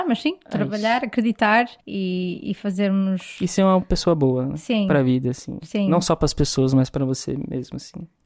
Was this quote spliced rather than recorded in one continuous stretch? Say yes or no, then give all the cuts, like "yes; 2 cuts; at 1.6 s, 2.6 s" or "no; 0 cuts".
yes; 1 cut; at 1.8 s